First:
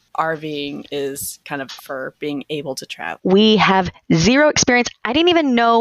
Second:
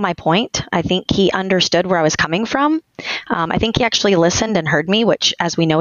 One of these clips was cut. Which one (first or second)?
first